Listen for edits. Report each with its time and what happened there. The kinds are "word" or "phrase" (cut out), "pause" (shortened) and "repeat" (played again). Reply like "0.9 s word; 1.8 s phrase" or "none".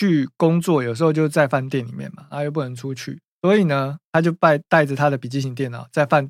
3.3 s pause; 4.0 s pause